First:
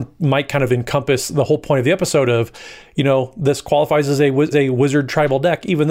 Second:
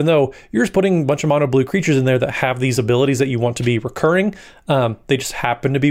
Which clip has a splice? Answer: first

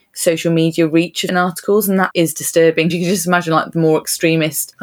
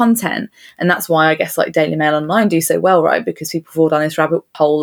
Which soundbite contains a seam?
first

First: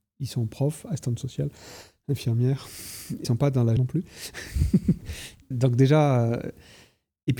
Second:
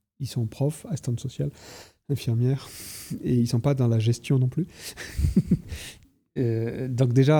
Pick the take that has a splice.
first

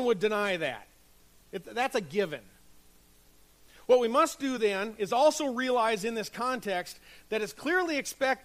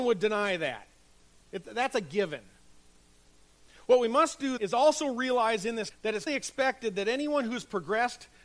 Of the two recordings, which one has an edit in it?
second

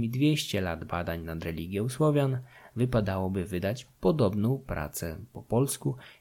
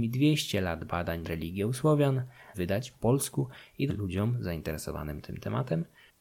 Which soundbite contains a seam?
second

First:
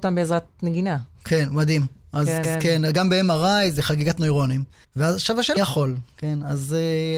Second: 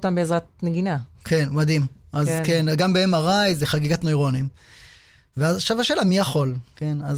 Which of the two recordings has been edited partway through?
first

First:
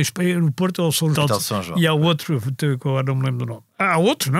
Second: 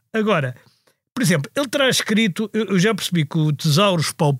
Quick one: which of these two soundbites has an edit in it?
first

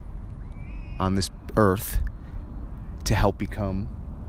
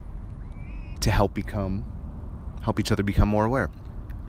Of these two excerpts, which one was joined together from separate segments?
second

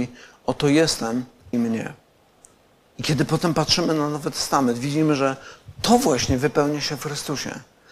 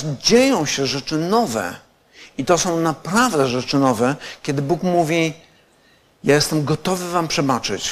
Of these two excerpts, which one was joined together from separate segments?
first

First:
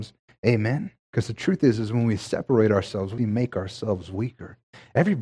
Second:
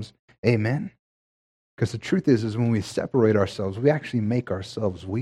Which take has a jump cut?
first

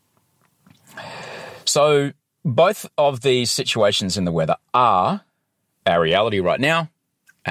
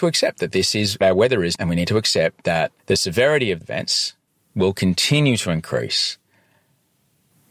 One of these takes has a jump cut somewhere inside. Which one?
second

